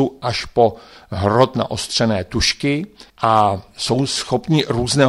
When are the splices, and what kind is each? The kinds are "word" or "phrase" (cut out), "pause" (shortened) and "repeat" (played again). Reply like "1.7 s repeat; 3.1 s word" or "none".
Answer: 3.1 s pause